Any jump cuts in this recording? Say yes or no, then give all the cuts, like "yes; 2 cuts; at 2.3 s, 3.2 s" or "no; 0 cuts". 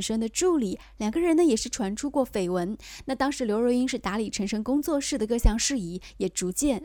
no; 0 cuts